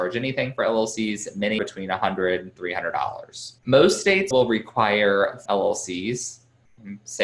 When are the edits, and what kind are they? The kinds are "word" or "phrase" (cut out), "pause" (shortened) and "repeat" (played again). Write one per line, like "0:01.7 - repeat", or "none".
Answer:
0:01.6 - word
0:02.6 - word
0:03.6 - pause
0:04.3 - word
0:05.5 - word